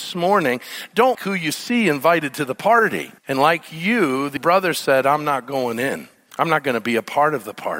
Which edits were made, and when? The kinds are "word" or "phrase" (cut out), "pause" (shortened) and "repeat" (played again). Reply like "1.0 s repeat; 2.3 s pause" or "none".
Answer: 1.1 s word; 3.2 s pause; 4.4 s word; 6.3 s pause